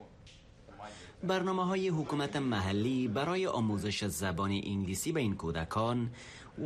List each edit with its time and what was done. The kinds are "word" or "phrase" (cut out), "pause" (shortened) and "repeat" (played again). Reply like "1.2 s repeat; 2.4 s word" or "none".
none